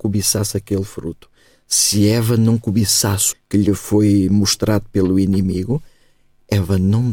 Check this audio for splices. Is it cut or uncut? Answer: cut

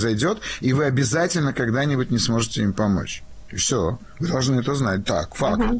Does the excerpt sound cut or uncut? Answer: uncut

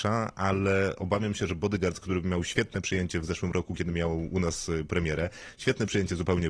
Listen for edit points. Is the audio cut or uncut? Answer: uncut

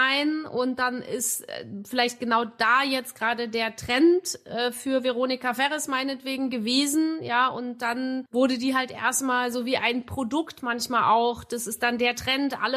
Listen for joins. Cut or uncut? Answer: uncut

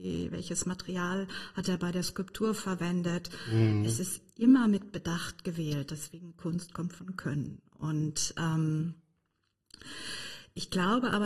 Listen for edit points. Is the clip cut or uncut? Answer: uncut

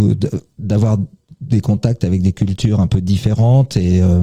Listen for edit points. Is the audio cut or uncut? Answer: uncut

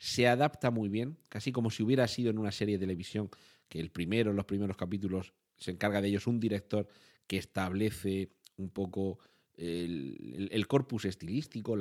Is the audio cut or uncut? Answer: uncut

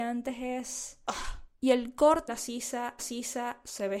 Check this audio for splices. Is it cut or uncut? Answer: cut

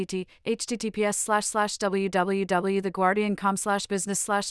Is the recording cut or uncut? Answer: uncut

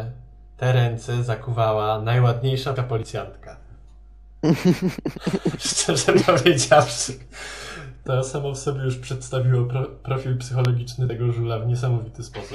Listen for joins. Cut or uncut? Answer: cut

